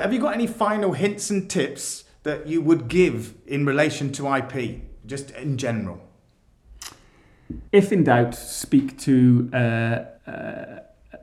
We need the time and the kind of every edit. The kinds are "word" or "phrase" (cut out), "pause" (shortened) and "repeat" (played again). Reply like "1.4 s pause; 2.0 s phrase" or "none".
7.7 s pause; 10.2 s pause